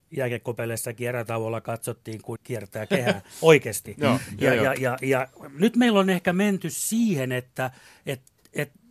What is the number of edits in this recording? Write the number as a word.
one